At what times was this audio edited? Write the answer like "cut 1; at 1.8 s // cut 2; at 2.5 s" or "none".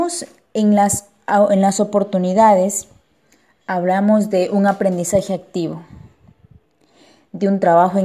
none